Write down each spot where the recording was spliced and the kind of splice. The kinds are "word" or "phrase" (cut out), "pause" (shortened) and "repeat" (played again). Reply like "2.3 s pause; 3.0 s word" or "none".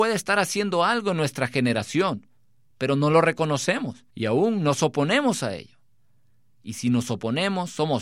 4.1 s pause